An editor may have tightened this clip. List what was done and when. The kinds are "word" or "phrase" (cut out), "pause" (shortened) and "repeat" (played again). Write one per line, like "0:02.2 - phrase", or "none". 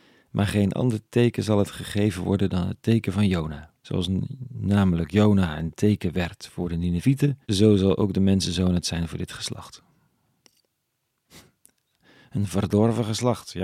0:03.8 - pause
0:07.4 - pause